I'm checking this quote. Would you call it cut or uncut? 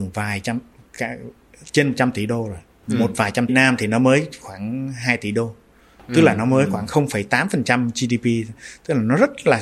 cut